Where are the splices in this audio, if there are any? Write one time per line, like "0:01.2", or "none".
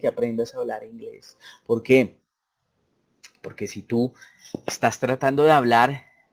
none

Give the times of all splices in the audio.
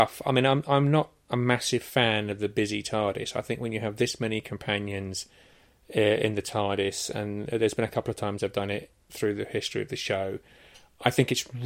0:01.2

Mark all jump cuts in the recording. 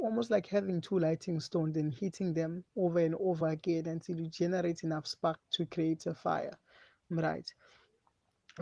none

